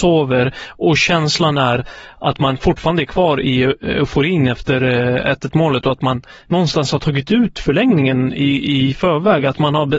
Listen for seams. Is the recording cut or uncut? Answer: uncut